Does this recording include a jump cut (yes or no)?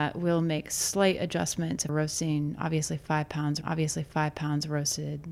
yes